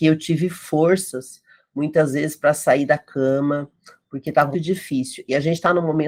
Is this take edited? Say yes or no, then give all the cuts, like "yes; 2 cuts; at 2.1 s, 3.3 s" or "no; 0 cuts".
yes; 1 cut; at 4.5 s